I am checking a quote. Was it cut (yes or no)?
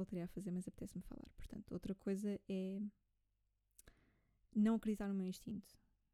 no